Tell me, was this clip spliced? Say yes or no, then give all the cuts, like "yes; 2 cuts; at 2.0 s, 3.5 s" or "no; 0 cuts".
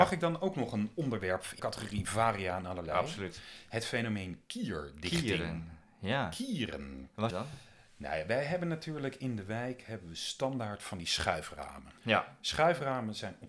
yes; 3 cuts; at 1.6 s, 7.3 s, 12.0 s